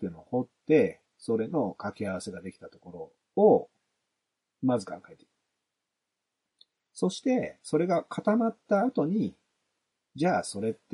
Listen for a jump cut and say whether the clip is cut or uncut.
uncut